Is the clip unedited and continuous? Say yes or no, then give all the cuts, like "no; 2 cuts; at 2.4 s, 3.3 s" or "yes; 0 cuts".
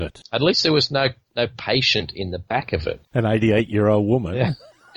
no; 1 cut; at 3.0 s